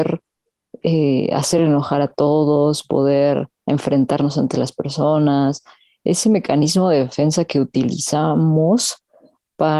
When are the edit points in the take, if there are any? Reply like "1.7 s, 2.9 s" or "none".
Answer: none